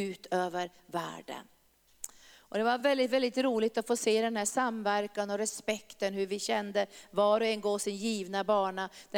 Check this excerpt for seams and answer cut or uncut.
uncut